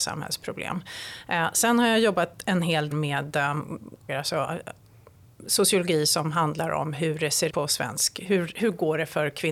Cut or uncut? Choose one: cut